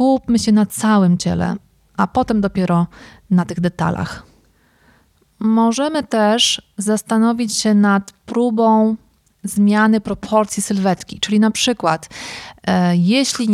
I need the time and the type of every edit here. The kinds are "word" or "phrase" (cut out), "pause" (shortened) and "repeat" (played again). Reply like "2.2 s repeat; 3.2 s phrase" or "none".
none